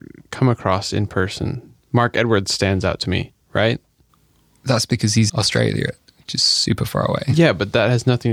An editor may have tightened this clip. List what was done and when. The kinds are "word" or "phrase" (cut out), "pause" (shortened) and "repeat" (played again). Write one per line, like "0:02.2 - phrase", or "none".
0:03.4 - pause
0:05.3 - word